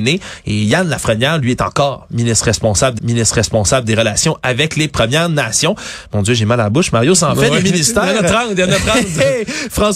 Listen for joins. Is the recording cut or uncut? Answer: cut